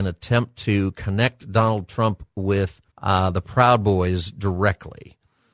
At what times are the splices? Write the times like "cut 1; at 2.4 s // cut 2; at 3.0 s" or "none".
cut 1; at 2.9 s

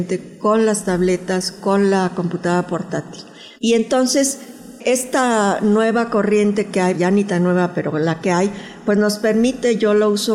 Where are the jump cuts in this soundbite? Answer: cut 1; at 3.6 s // cut 2; at 6.9 s

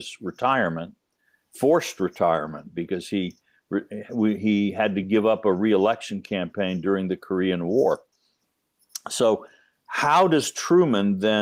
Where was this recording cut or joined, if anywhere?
none

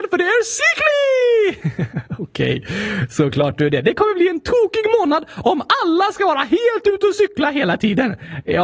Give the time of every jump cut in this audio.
none

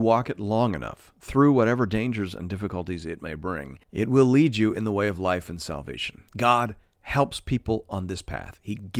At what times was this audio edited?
cut 1; at 3.8 s // cut 2; at 6.3 s

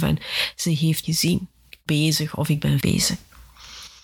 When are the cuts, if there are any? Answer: cut 1; at 1.0 s // cut 2; at 1.9 s // cut 3; at 2.8 s

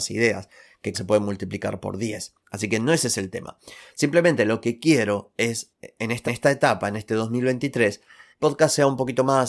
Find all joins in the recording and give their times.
cut 1; at 0.9 s // cut 2; at 6.2 s // cut 3; at 8.4 s

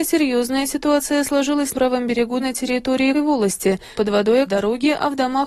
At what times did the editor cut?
cut 1; at 1.7 s // cut 2; at 2.4 s // cut 3; at 3.1 s // cut 4; at 4.0 s // cut 5; at 4.5 s

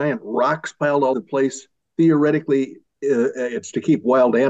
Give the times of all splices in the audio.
cut 1; at 1.1 s

